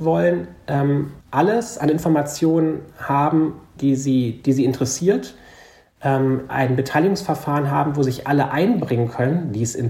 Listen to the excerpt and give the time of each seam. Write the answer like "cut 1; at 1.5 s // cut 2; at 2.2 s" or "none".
cut 1; at 1.2 s // cut 2; at 3.8 s // cut 3; at 6.5 s